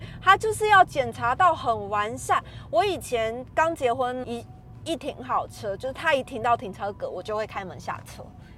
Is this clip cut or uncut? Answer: cut